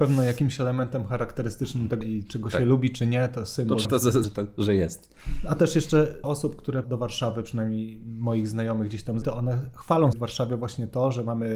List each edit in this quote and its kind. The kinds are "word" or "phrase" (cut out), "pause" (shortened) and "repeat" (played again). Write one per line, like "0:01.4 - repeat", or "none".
0:02.0 - word
0:03.8 - word
0:04.2 - word
0:06.2 - word
0:06.8 - word
0:09.2 - word
0:10.1 - word